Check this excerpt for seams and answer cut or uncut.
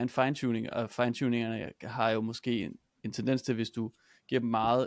uncut